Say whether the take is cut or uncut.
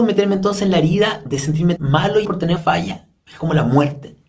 cut